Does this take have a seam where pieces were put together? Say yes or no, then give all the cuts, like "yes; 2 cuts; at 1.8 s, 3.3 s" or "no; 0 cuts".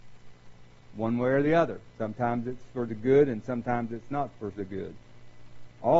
no; 0 cuts